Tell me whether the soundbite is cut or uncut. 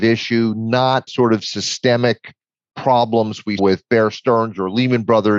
cut